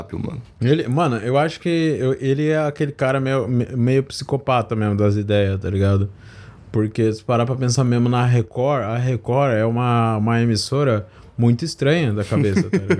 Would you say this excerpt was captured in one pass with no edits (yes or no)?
yes